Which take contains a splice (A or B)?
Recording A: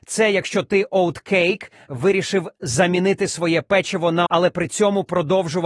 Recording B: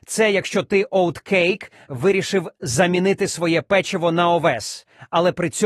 A